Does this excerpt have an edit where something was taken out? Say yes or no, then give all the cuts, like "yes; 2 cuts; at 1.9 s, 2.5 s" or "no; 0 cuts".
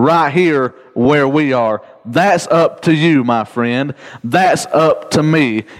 no; 0 cuts